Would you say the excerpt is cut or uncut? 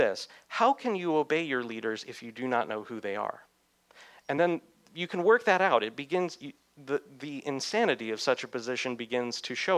uncut